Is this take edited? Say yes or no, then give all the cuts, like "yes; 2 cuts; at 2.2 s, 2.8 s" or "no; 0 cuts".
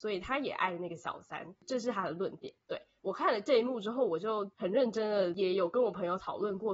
yes; 1 cut; at 2.6 s